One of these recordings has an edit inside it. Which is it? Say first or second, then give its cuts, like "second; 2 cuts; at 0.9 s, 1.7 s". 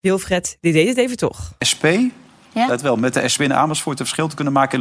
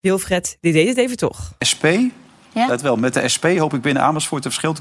first; 1 cut; at 3.4 s